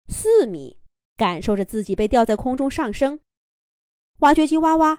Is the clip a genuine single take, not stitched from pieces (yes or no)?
no